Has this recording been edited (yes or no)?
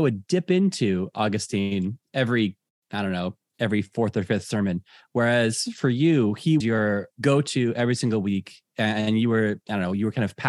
yes